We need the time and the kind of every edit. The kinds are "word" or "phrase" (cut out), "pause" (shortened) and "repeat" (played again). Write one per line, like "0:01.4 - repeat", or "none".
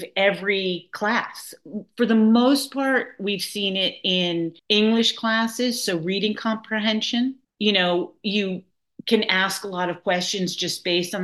0:04.6 - pause
0:07.4 - pause